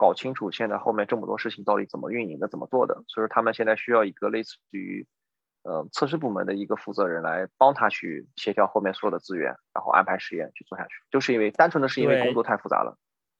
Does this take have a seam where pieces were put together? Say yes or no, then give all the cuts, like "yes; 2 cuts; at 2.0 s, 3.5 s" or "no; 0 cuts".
yes; 1 cut; at 11.0 s